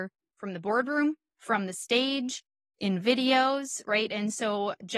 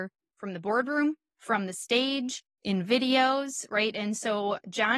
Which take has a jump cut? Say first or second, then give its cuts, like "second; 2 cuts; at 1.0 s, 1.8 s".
second; 1 cut; at 2.5 s